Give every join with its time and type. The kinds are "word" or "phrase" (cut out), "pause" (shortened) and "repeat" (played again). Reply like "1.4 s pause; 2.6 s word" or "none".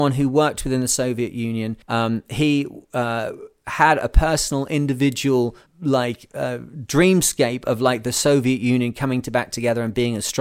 1.8 s pause; 5.7 s pause